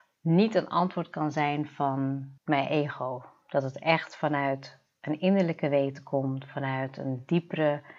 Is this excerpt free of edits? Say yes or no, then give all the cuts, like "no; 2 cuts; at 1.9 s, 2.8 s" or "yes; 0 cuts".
no; 1 cut; at 2.4 s